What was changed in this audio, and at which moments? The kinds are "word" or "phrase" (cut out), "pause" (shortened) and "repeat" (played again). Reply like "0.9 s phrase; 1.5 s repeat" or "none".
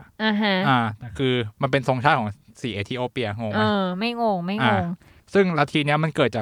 none